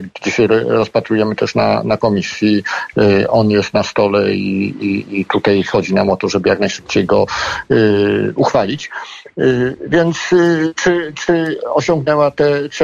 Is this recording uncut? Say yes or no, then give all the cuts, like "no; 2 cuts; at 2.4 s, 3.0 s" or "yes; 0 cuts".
yes; 0 cuts